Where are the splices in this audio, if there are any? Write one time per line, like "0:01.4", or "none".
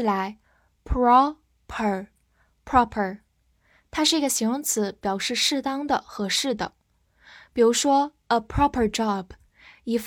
none